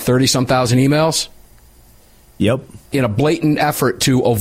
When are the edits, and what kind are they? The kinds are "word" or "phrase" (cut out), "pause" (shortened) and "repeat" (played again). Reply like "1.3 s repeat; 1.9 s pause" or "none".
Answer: 2.8 s pause